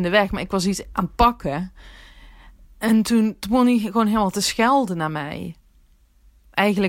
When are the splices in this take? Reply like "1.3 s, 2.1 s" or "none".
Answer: 2.6 s